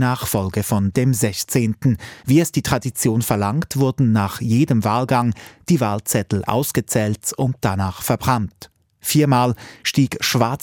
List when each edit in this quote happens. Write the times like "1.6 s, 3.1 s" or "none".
0.9 s, 2.2 s, 6.5 s